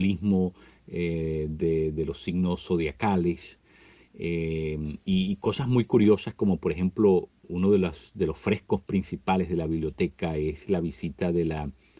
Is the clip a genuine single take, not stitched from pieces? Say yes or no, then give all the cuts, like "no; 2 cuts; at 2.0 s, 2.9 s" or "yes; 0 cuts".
yes; 0 cuts